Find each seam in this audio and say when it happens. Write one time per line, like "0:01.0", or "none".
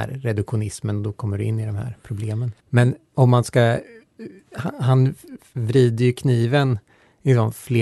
0:02.6